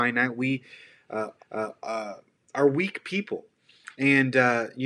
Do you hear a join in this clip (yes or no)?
yes